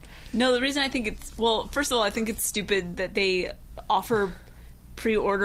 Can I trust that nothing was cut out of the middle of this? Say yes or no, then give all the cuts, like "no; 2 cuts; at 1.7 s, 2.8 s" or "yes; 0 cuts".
yes; 0 cuts